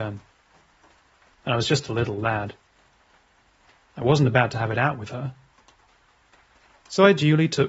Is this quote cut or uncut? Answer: uncut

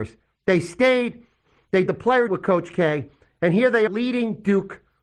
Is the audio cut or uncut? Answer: cut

